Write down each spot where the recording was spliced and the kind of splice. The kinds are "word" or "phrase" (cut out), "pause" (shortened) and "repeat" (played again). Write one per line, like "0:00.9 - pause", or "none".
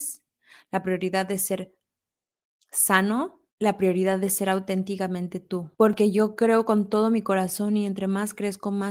0:03.5 - pause
0:05.7 - pause